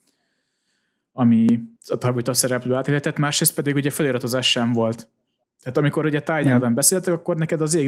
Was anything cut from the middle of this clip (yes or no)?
yes